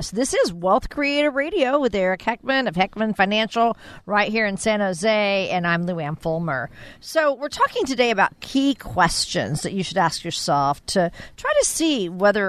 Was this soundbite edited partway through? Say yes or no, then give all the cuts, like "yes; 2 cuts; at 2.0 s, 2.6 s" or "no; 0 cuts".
no; 0 cuts